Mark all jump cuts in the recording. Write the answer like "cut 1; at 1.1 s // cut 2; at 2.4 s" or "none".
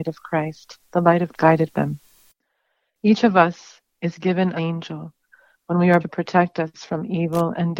cut 1; at 1.3 s // cut 2; at 1.7 s // cut 3; at 4.6 s // cut 4; at 6.0 s